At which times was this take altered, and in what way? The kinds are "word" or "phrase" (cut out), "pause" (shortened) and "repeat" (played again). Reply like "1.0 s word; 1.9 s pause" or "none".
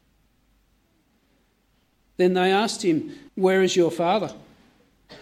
3.3 s pause